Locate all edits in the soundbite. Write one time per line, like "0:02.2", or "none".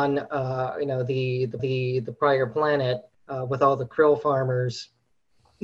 0:01.6
0:03.1